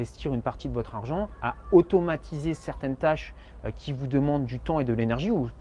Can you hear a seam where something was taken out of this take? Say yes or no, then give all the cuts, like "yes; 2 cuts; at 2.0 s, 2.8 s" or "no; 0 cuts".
no; 0 cuts